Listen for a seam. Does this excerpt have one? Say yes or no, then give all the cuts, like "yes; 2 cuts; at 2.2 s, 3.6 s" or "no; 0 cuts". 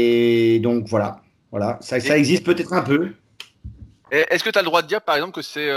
no; 0 cuts